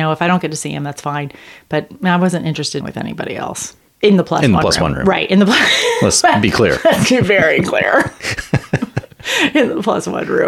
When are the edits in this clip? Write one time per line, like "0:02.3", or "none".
0:02.8